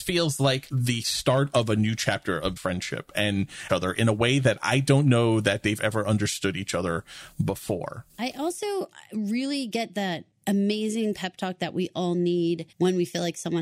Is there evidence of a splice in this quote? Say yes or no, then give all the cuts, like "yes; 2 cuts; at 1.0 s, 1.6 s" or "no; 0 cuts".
yes; 4 cuts; at 2.6 s, 3.7 s, 8.1 s, 12.7 s